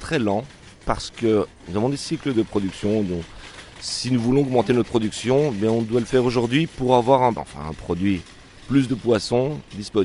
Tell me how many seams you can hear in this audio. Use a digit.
1